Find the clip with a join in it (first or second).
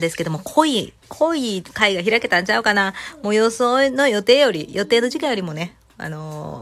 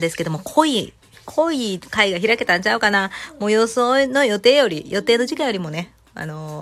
first